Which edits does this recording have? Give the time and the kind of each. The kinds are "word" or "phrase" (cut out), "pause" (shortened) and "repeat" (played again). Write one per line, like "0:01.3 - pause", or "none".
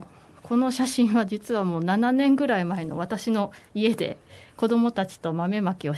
0:03.7 - pause